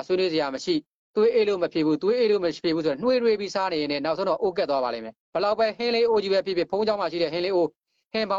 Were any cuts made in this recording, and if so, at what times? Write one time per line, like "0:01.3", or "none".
0:05.2